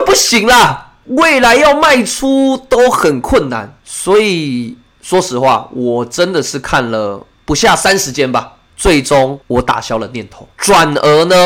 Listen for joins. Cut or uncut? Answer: cut